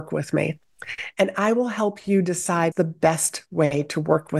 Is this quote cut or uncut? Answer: cut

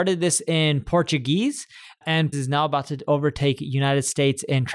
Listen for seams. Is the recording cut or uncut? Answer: cut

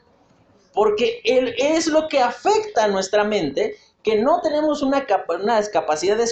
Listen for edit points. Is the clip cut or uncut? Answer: uncut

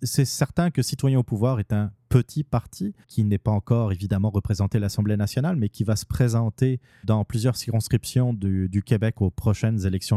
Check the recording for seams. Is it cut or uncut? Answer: cut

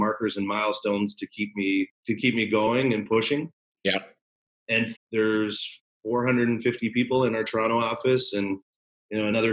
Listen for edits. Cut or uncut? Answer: cut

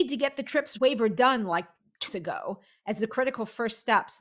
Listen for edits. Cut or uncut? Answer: cut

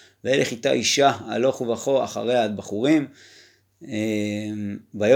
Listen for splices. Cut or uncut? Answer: uncut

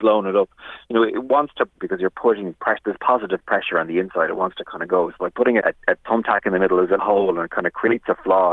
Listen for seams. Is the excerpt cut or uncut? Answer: cut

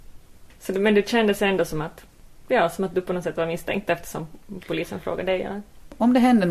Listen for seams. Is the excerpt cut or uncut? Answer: uncut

